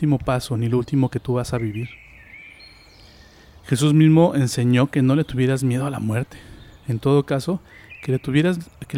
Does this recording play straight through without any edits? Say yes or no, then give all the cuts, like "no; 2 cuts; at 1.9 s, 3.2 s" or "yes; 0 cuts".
yes; 0 cuts